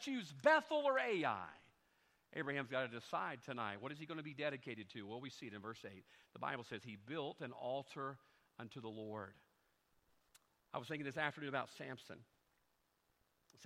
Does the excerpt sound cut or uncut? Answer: uncut